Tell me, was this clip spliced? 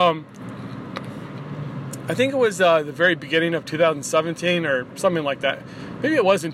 no; 0 cuts

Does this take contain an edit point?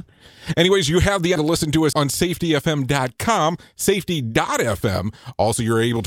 yes; 2 cuts; at 1.4 s, 1.9 s

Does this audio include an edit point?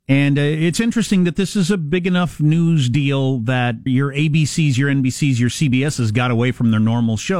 yes; 1 cut; at 3.9 s

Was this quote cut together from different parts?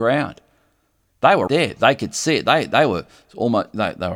yes; 1 cut; at 1.5 s

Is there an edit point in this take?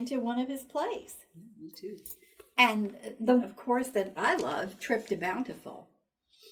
yes; 3 cuts; at 3.4 s, 4.2 s, 4.8 s

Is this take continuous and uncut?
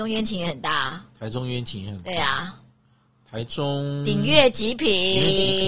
yes; 0 cuts

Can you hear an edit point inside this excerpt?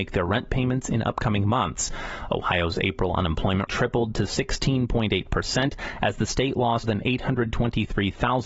yes; 2 cuts; at 3.7 s, 6.8 s

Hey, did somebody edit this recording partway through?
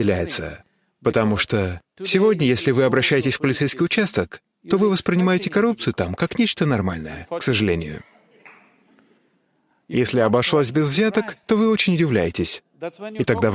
no; 0 cuts

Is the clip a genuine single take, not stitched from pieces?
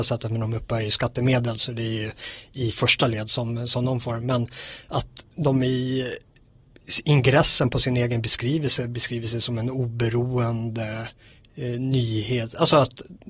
yes; 0 cuts

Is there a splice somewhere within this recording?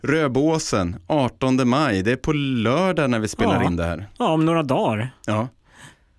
no; 0 cuts

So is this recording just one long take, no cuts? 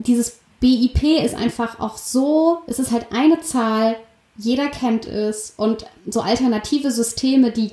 yes; 0 cuts

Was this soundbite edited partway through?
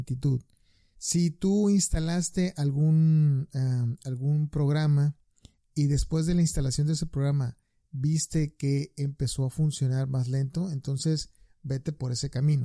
no; 0 cuts

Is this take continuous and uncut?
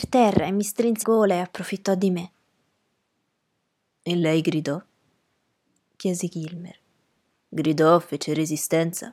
no; 1 cut; at 1.0 s

